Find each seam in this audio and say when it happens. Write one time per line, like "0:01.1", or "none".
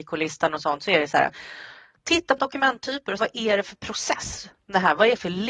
0:02.4
0:03.2

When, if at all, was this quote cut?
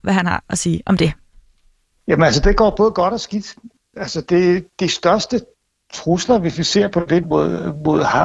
0:07.2

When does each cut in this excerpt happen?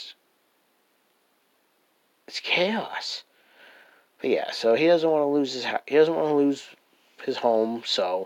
none

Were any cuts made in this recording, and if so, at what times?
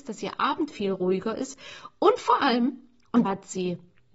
0:03.2

